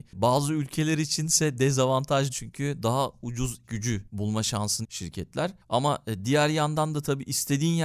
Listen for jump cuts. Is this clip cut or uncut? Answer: cut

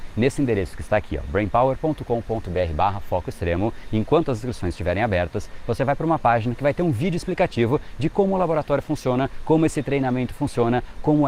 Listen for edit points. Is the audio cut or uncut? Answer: uncut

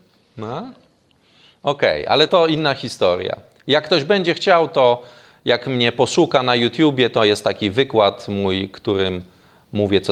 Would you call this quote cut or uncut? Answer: cut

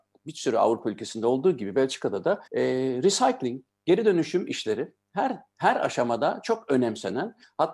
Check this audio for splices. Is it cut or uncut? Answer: cut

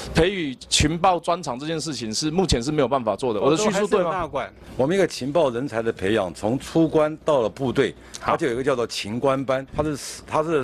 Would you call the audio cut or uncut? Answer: cut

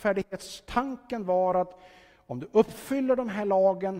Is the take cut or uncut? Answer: uncut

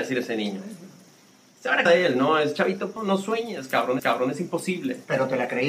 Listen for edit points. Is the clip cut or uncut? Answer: cut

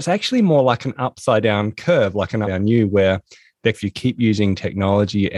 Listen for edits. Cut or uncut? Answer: cut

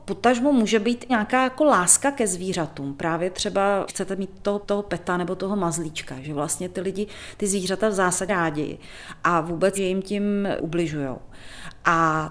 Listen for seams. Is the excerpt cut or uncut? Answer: cut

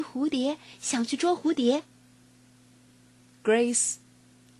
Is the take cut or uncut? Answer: uncut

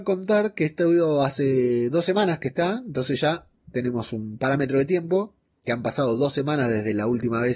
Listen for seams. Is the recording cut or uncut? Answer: uncut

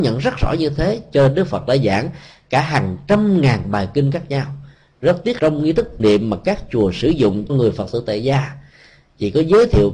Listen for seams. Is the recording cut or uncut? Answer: cut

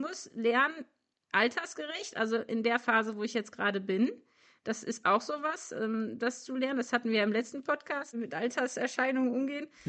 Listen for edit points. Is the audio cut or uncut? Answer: uncut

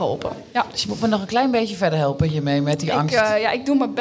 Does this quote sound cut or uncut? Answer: uncut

